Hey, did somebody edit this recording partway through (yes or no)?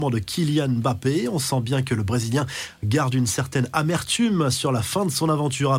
no